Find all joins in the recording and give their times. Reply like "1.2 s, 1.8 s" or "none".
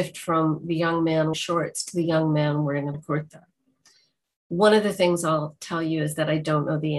1.3 s, 2.9 s